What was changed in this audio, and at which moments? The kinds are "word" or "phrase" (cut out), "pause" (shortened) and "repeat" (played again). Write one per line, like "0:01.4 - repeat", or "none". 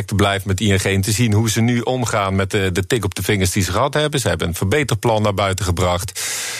none